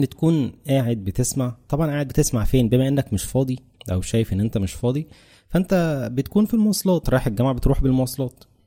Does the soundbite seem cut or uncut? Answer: cut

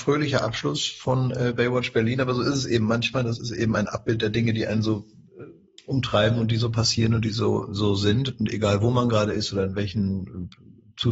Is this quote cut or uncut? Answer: uncut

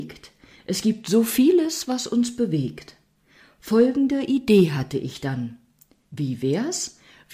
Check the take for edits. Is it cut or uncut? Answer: uncut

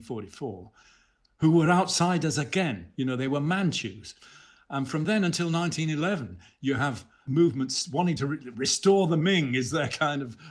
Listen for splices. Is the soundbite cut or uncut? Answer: uncut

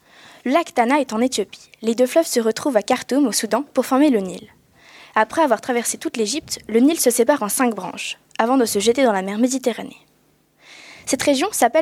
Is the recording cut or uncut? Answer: uncut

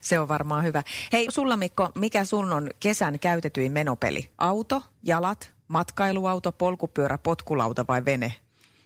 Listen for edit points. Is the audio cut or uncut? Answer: cut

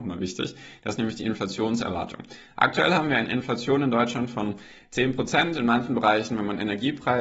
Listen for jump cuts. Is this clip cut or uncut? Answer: uncut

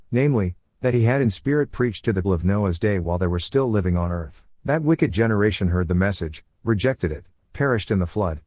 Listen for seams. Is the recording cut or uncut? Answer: cut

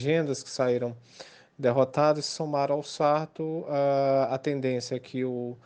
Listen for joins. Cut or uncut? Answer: uncut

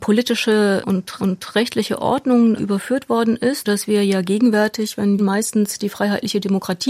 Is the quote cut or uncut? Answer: cut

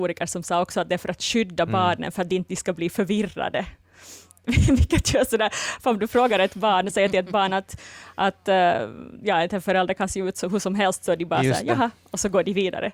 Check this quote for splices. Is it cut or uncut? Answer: uncut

